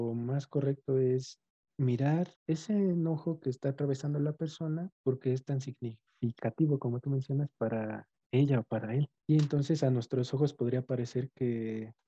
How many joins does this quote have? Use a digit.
3